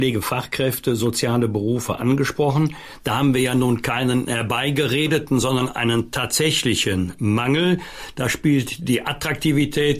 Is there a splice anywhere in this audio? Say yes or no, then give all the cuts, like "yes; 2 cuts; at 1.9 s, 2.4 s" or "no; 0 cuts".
no; 0 cuts